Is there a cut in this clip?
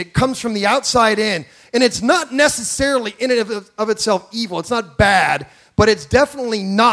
no; 0 cuts

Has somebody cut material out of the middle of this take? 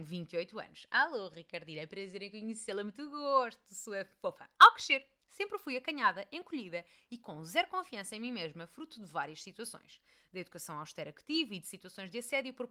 no; 0 cuts

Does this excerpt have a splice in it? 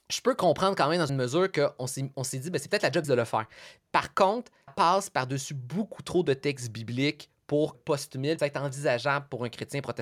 yes; 5 cuts; at 1.1 s, 3.0 s, 4.7 s, 7.7 s, 8.4 s

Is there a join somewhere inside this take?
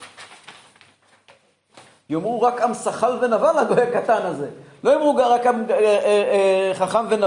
no; 0 cuts

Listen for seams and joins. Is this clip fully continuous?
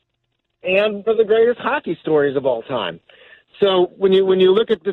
no; 1 cut; at 1.1 s

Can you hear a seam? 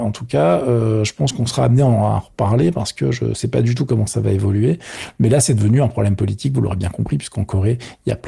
no; 0 cuts

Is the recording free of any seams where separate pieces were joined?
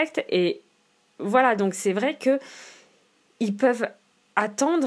yes; 0 cuts

